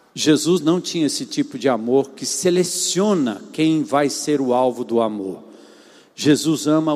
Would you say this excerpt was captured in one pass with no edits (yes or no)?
yes